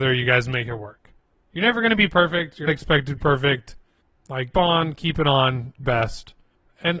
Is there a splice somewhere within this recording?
yes; 4 cuts; at 2.7 s, 3.2 s, 4.5 s, 5.8 s

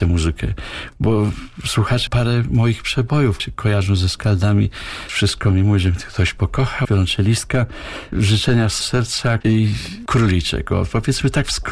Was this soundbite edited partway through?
yes; 6 cuts; at 2.1 s, 3.4 s, 6.8 s, 8.1 s, 8.8 s, 9.4 s

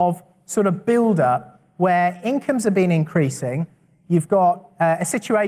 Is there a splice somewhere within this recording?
no; 0 cuts

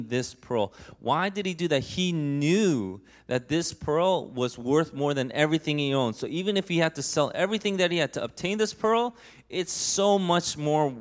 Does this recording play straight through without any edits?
yes; 0 cuts

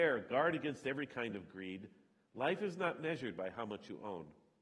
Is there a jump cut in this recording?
no; 0 cuts

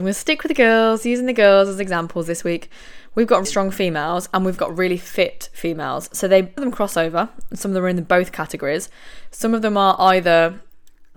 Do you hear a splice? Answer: yes; 3 cuts; at 3.4 s, 4.6 s, 6.6 s

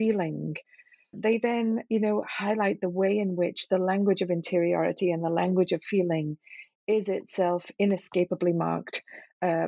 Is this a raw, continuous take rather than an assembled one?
no; 1 cut; at 1.1 s

